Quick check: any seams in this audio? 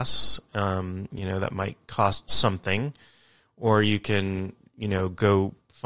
no; 0 cuts

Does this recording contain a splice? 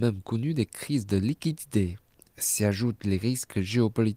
no; 0 cuts

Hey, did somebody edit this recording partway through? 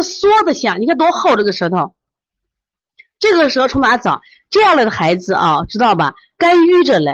no; 0 cuts

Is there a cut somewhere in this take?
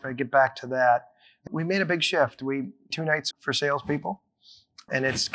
yes; 2 cuts; at 1.5 s, 3.3 s

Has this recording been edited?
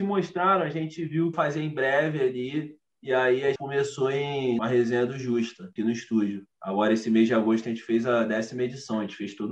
yes; 5 cuts; at 1.3 s, 3.6 s, 4.6 s, 5.8 s, 6.5 s

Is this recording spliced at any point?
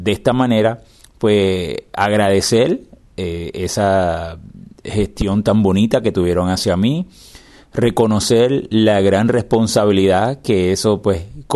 no; 0 cuts

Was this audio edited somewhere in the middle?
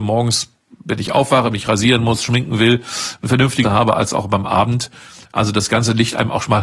yes; 1 cut; at 3.6 s

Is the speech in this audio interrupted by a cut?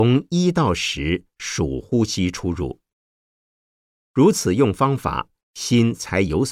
no; 0 cuts

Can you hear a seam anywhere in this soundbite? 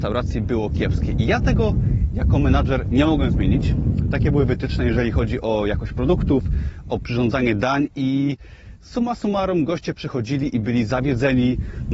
no; 0 cuts

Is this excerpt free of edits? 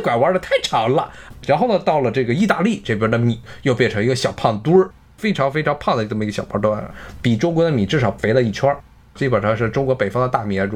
yes; 0 cuts

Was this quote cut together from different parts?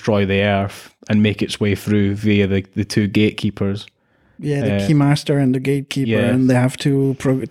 no; 0 cuts

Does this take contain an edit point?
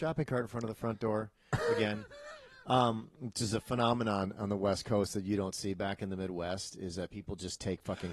no; 0 cuts

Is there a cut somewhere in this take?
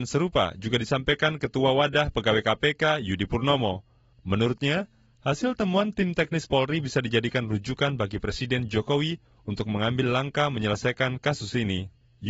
no; 0 cuts

